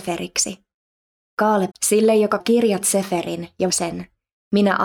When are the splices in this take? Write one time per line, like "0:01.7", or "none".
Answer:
0:01.7
0:02.4
0:03.7